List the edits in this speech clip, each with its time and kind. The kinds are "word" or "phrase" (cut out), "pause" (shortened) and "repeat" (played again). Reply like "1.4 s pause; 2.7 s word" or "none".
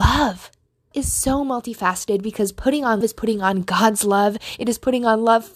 0.9 s word; 3.0 s word